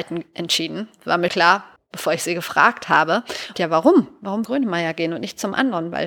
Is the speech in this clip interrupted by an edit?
yes; 4 cuts; at 1.3 s, 1.8 s, 3.5 s, 4.4 s

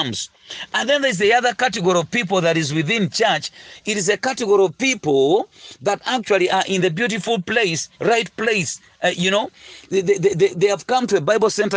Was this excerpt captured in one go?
no; 1 cut; at 7.9 s

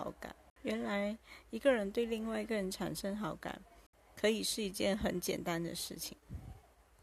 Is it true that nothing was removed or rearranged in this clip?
yes; 0 cuts

